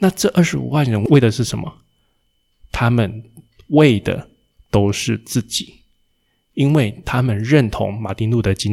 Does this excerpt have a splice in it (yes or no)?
no